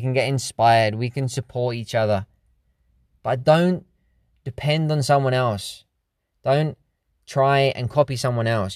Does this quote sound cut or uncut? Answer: uncut